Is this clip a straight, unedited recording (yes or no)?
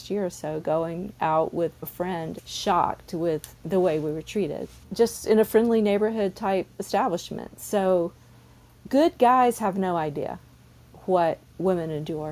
no